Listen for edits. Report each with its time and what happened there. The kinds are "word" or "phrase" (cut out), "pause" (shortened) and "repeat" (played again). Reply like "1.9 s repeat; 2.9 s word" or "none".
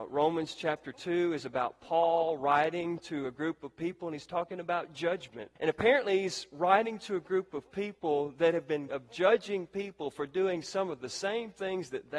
5.6 s pause; 8.9 s word